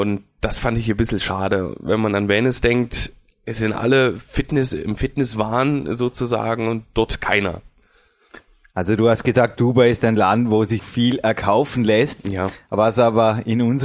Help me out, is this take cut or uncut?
cut